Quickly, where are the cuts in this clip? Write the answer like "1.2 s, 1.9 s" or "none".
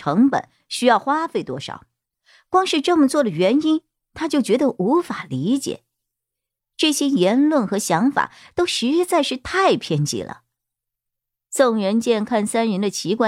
none